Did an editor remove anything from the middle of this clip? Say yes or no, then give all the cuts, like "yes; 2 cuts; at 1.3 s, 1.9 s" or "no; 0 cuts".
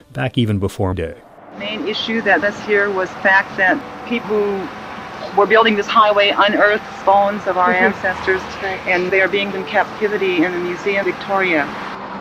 yes; 8 cuts; at 0.9 s, 2.4 s, 3.2 s, 4.2 s, 7.0 s, 9.1 s, 9.5 s, 11.0 s